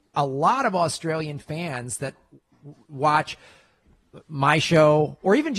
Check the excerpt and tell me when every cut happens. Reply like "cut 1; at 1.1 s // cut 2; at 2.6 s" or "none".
none